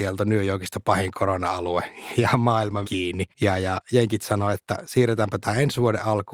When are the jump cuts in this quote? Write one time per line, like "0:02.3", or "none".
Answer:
0:02.2
0:02.8
0:03.3